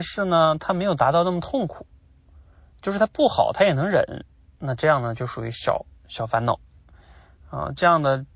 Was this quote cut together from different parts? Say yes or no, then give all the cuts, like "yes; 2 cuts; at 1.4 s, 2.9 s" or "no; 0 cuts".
no; 0 cuts